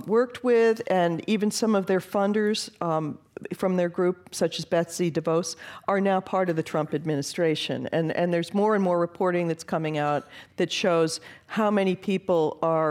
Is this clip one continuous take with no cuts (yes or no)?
yes